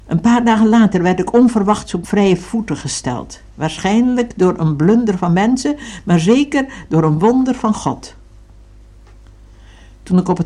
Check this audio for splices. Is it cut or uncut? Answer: cut